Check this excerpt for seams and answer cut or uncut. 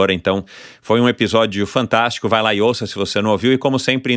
uncut